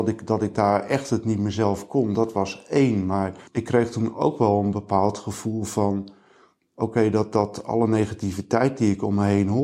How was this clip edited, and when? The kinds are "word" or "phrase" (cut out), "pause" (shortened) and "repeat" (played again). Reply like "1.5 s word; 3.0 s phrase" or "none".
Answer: none